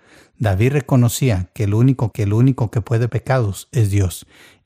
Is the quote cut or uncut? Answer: cut